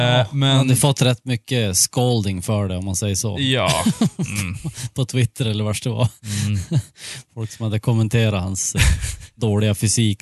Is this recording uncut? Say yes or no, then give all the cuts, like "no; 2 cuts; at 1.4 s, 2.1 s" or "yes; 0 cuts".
yes; 0 cuts